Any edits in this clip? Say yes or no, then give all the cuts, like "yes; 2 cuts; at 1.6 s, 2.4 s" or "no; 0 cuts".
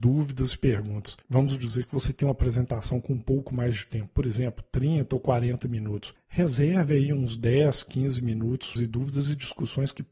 yes; 1 cut; at 8.8 s